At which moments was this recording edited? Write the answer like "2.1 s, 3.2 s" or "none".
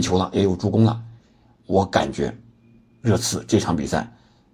none